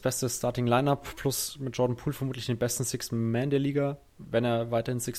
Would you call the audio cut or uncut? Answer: uncut